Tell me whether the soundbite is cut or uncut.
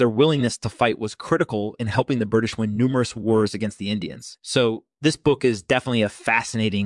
uncut